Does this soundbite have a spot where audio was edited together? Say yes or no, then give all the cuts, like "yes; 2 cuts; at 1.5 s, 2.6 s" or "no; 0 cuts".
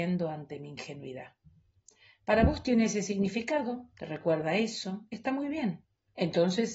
no; 0 cuts